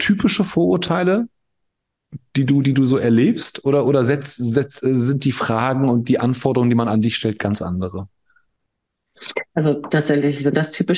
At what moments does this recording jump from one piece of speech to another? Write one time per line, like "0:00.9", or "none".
0:09.5